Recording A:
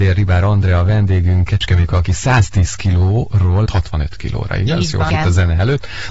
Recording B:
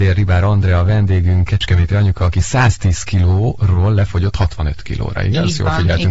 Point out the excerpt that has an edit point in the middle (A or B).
A